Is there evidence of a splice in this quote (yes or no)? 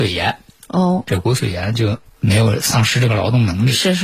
yes